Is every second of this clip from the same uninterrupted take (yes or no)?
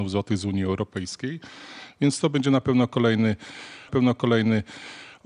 no